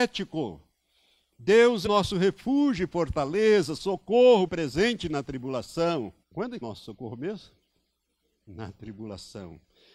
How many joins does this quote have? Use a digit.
4